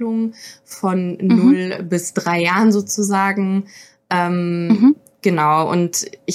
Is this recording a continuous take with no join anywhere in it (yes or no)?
yes